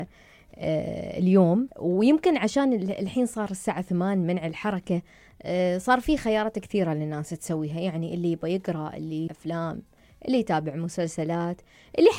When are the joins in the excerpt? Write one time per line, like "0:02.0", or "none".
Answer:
0:01.7
0:09.3